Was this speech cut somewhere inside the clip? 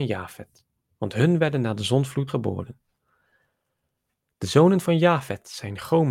yes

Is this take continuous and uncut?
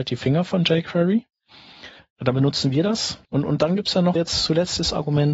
no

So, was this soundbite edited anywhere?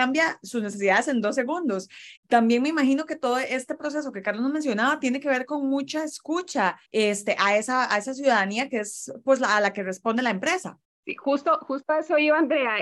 yes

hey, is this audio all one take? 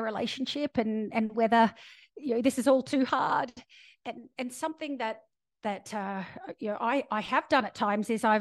yes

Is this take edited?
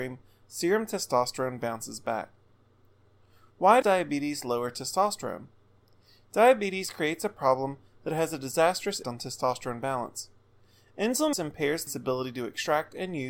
yes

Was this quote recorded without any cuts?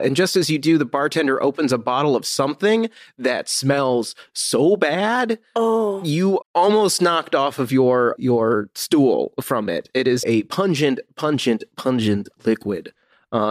no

